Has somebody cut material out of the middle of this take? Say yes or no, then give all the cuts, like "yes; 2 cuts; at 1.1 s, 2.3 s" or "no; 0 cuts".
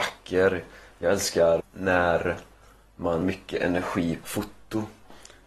yes; 3 cuts; at 1.6 s, 3.2 s, 4.2 s